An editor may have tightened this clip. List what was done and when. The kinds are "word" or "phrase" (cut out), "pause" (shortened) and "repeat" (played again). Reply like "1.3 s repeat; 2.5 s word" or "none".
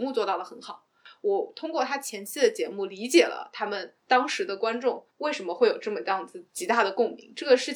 4.0 s pause; 5.1 s pause; 6.5 s pause